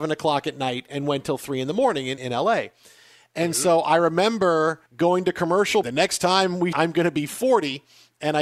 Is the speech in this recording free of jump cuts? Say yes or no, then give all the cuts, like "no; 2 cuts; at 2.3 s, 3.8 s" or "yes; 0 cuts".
no; 4 cuts; at 2.2 s, 4.9 s, 5.8 s, 6.7 s